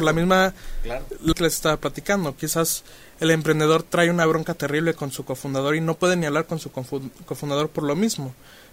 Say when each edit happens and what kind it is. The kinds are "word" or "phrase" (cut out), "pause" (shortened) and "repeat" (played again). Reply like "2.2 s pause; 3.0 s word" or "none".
1.3 s phrase